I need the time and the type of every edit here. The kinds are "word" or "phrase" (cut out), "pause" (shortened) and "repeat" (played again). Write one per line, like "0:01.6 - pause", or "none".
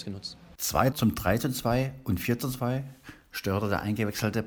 0:00.9 - word

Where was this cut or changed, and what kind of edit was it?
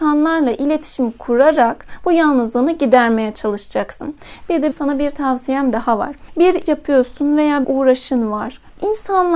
0:04.7 - word
0:06.7 - word
0:07.6 - word

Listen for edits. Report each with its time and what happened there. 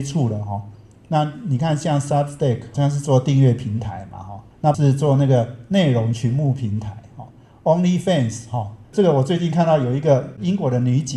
0:02.7 - word
0:04.7 - word

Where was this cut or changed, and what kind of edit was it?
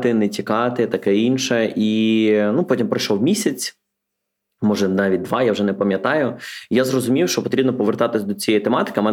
none

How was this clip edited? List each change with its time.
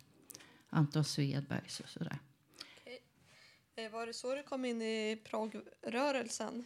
none

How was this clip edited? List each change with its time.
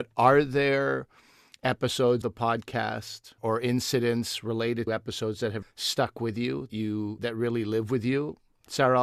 0:02.2 - word
0:03.4 - word
0:04.9 - word
0:05.6 - word
0:06.7 - word
0:07.2 - word

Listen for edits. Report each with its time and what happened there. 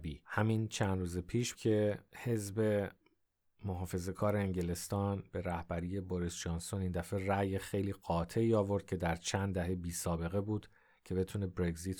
0:01.6 - word

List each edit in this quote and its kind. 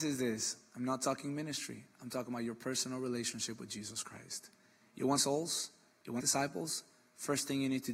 0:05.2 - word
0:06.2 - word

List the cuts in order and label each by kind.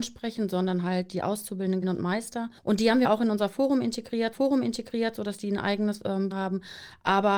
0:01.8 - word
0:02.6 - pause
0:03.0 - word
0:04.3 - repeat
0:06.3 - phrase

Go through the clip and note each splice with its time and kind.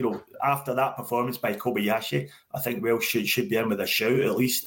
none

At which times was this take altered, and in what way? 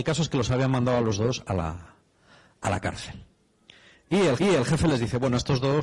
0:04.4 - repeat

